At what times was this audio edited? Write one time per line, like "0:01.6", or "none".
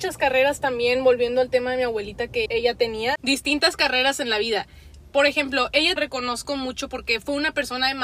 0:02.5
0:03.2
0:06.0